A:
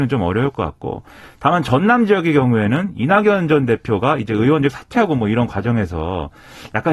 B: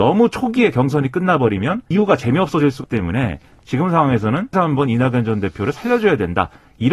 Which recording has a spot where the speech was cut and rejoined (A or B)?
B